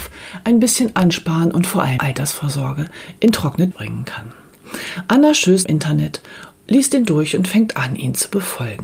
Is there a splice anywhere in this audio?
yes; 3 cuts; at 2.0 s, 3.7 s, 5.6 s

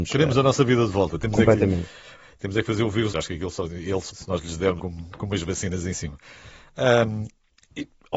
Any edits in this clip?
yes; 3 cuts; at 3.1 s, 4.1 s, 4.8 s

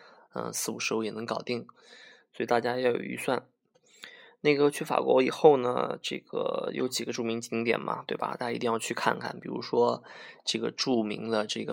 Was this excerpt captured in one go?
yes; 0 cuts

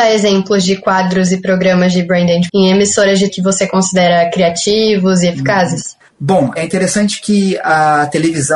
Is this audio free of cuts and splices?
no; 3 cuts; at 2.5 s, 3.3 s, 6.6 s

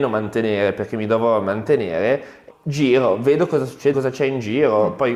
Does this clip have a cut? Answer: yes; 2 cuts; at 2.5 s, 3.9 s

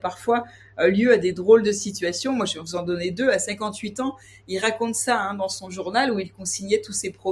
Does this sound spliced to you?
no; 0 cuts

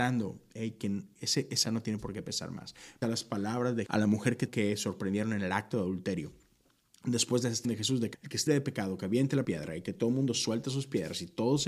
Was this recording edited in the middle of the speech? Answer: yes; 8 cuts; at 1.6 s, 3.0 s, 3.9 s, 4.5 s, 7.6 s, 8.1 s, 8.5 s, 9.4 s

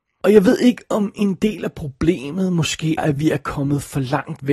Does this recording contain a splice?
yes; 1 cut; at 3.0 s

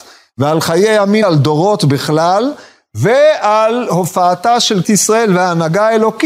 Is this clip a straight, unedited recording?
no; 2 cuts; at 1.2 s, 4.8 s

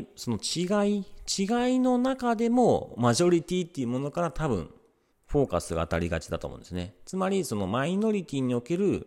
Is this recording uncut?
no; 1 cut; at 5.1 s

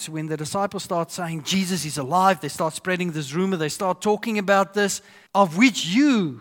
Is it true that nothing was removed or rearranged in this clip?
no; 1 cut; at 5.3 s

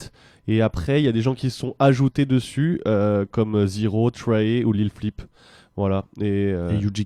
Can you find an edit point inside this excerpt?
no; 0 cuts

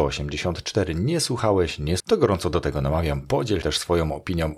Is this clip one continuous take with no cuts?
no; 2 cuts; at 2.0 s, 3.6 s

